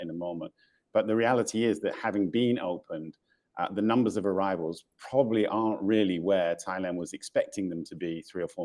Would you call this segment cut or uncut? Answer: uncut